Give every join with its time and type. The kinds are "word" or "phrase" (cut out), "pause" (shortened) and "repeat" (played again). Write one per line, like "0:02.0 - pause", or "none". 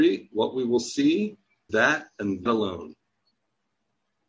0:01.7 - word
0:02.5 - word

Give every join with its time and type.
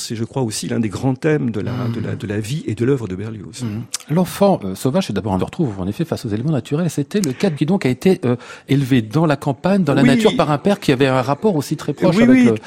0:05.4 - phrase
0:07.6 - word

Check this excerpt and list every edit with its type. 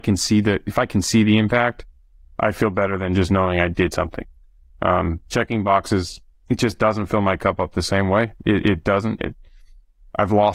none

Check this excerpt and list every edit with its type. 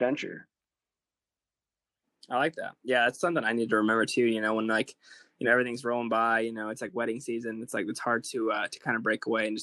none

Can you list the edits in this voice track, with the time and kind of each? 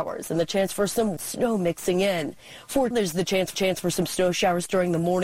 0:01.2 - word
0:02.9 - word
0:03.5 - repeat

